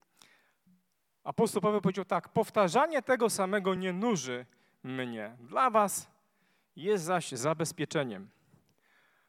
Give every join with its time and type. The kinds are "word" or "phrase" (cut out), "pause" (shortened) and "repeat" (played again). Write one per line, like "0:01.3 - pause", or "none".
none